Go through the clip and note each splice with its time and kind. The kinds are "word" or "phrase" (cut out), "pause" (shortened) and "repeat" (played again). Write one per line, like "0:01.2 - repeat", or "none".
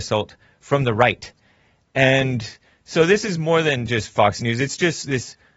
none